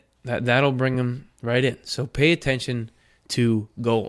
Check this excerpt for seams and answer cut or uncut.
uncut